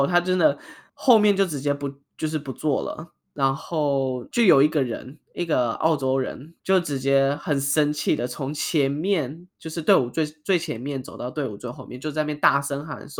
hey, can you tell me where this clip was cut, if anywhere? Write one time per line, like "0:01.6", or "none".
0:06.6